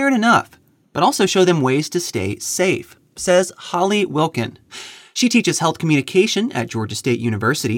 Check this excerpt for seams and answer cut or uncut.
uncut